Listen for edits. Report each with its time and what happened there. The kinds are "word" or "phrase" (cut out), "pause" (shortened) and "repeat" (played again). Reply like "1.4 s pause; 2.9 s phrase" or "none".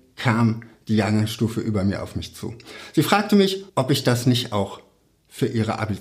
3.7 s pause